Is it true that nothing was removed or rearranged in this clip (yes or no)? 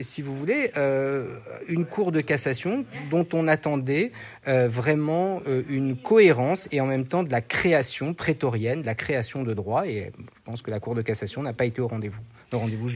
yes